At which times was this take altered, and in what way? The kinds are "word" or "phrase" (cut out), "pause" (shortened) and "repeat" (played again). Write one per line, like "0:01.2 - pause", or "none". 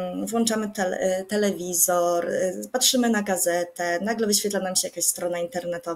none